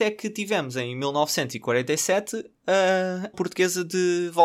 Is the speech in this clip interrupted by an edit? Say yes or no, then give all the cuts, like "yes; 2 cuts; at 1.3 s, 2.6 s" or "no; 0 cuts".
yes; 1 cut; at 3.3 s